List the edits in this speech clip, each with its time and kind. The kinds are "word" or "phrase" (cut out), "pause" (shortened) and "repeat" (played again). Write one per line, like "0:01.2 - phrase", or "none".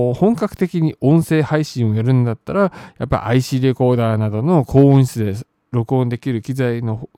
none